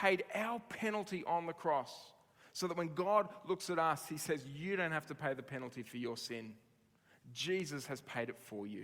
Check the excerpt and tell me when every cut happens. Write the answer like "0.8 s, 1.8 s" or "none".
none